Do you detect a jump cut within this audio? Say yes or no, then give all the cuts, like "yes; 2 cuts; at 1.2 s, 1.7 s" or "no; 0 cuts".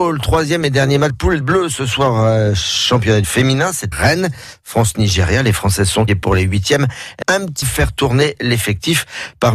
yes; 7 cuts; at 1.1 s, 1.4 s, 3.2 s, 3.9 s, 6.1 s, 7.2 s, 7.6 s